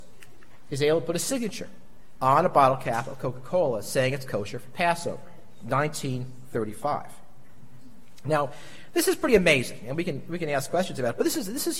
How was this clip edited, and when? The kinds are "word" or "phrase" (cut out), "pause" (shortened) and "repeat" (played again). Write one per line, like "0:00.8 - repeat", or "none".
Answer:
none